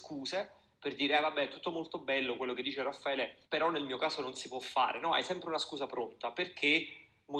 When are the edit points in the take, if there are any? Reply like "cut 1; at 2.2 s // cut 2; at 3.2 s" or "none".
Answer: cut 1; at 3.4 s